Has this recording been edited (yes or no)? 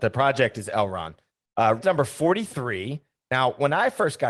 yes